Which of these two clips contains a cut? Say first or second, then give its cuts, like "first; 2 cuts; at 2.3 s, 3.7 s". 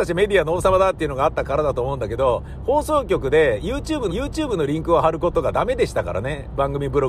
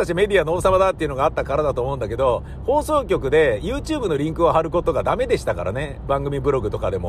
first; 1 cut; at 4.1 s